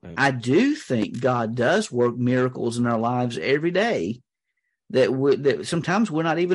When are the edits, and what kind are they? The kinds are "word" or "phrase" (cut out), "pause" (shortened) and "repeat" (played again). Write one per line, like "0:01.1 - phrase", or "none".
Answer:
none